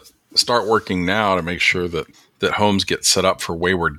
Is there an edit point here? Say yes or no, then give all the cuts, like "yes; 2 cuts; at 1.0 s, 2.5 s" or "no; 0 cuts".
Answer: yes; 1 cut; at 2.1 s